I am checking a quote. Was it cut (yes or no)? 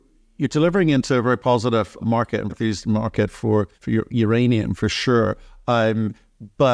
yes